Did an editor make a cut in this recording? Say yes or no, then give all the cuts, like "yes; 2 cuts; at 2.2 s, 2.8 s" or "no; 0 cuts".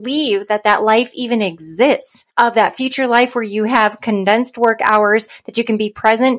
yes; 1 cut; at 2.3 s